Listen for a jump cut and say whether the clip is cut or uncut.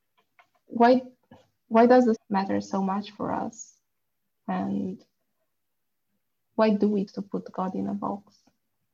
cut